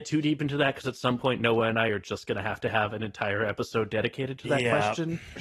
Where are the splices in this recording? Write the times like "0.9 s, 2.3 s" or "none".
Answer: none